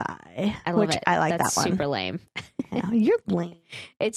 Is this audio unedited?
yes; 0 cuts

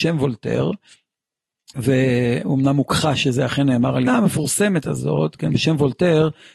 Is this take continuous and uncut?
no; 1 cut; at 4.1 s

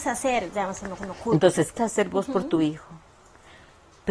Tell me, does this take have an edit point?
yes; 2 cuts; at 1.0 s, 1.8 s

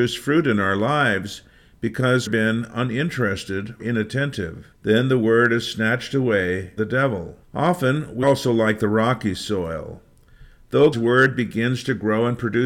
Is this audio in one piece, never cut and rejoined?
no; 7 cuts; at 2.3 s, 3.8 s, 4.7 s, 6.8 s, 7.4 s, 8.2 s, 10.9 s

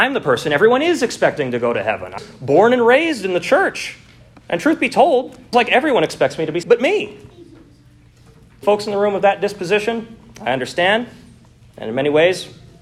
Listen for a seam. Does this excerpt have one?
yes; 4 cuts; at 2.2 s, 5.5 s, 6.6 s, 8.6 s

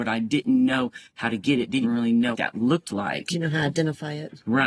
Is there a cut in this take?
yes; 2 cuts; at 1.8 s, 2.3 s

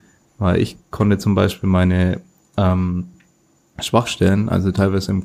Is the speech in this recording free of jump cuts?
yes; 0 cuts

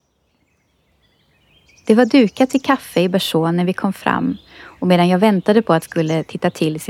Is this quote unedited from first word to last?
no; 1 cut; at 5.8 s

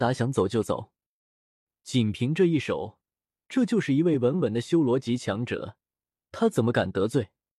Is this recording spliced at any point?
no; 0 cuts

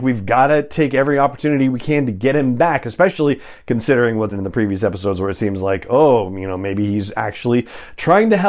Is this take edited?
yes; 1 cut; at 4.3 s

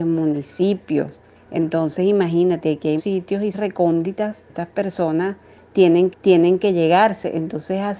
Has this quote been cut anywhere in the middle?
yes; 5 cuts; at 1.3 s, 3.0 s, 3.5 s, 4.5 s, 6.1 s

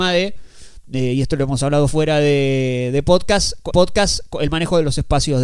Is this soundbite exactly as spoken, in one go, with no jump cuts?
no; 1 cut; at 3.7 s

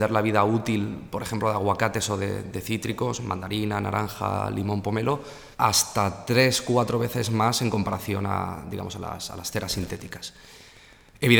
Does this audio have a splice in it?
yes; 1 cut; at 5.5 s

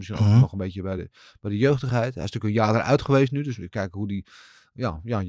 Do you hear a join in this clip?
no; 0 cuts

